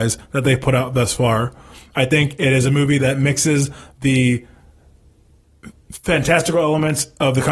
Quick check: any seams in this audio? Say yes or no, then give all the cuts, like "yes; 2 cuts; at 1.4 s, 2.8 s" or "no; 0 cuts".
no; 0 cuts